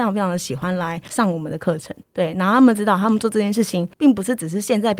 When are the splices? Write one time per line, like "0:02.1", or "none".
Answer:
0:02.0
0:03.9